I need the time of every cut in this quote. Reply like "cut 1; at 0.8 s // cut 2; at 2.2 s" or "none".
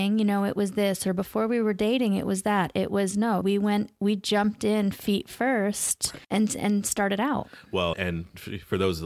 cut 1; at 3.4 s // cut 2; at 6.2 s // cut 3; at 7.9 s